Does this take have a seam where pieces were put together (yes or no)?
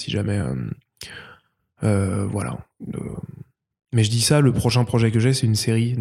no